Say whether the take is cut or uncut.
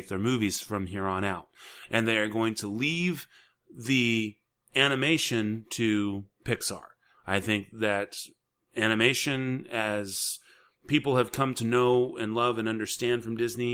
uncut